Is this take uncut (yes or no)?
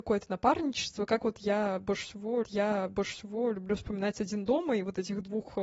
no